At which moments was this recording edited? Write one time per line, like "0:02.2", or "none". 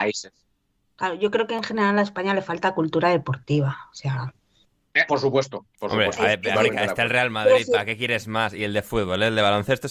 0:05.1
0:06.5